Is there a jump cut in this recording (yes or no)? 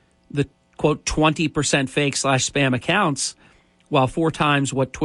no